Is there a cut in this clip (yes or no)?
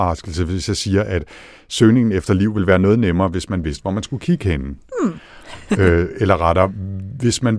no